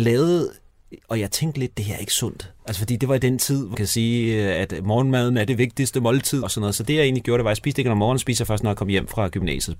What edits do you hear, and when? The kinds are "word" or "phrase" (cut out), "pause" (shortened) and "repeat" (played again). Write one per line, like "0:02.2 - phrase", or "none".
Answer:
0:02.6 - pause
0:03.7 - word
0:06.4 - word